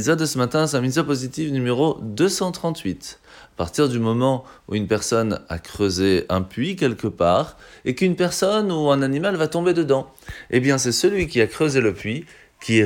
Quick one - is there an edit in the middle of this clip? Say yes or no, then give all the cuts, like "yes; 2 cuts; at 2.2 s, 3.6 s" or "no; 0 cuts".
no; 0 cuts